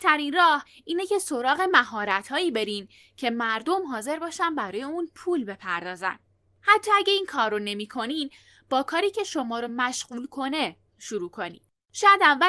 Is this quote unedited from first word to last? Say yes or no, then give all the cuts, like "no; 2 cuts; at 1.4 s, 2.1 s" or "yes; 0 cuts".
yes; 0 cuts